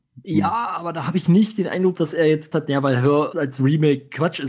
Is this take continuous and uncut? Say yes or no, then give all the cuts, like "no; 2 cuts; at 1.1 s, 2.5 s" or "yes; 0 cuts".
no; 3 cuts; at 1.9 s, 2.5 s, 3.3 s